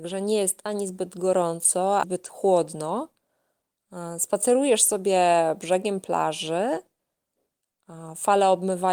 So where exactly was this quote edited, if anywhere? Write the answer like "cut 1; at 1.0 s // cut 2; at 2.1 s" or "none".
cut 1; at 2.0 s